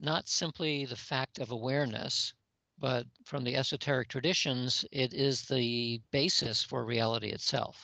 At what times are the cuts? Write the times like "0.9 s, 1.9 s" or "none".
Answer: 4.9 s